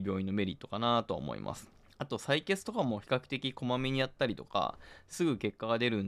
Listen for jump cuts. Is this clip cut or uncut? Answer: cut